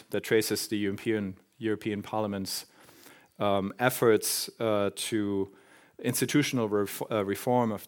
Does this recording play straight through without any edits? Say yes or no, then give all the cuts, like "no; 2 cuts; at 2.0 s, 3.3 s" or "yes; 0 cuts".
yes; 0 cuts